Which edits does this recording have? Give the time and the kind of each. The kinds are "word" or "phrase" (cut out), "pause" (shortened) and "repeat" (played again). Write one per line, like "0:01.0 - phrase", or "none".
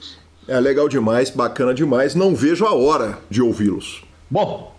none